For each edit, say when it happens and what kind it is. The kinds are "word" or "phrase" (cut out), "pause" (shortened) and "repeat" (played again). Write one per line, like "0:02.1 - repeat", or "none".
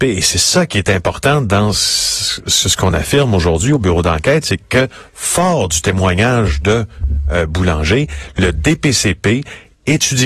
none